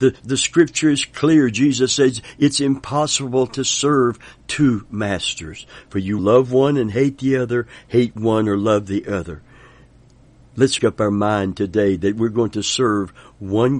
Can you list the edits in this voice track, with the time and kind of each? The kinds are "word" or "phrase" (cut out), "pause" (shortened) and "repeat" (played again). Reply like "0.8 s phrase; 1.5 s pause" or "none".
6.2 s word; 10.8 s word